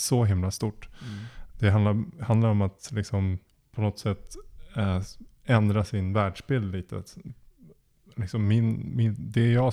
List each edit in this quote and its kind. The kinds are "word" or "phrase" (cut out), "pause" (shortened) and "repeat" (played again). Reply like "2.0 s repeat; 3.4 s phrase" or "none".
3.5 s pause

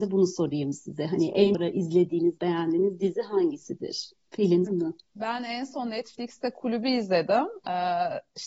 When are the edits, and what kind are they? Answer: 1.5 s phrase; 4.7 s phrase; 5.0 s pause

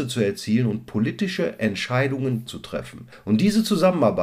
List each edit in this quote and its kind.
2.5 s word

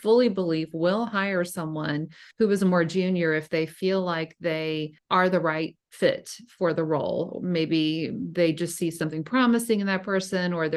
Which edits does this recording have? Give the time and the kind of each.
2.3 s pause; 5.0 s pause

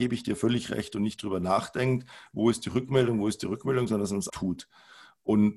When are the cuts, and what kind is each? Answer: 4.3 s word

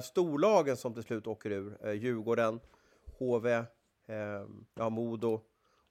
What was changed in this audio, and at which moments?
4.7 s pause

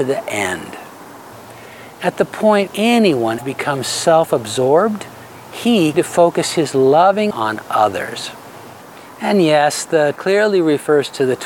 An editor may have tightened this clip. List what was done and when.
2.7 s word; 3.4 s phrase; 5.9 s word; 7.3 s word; 10.2 s word

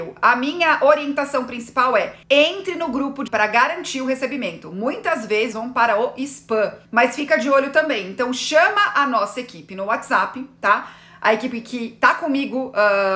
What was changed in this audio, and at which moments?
2.2 s pause; 3.3 s word; 5.5 s phrase; 6.8 s pause

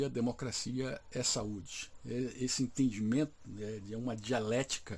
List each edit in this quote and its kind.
none

